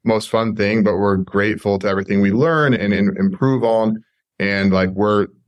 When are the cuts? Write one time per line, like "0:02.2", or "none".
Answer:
0:02.8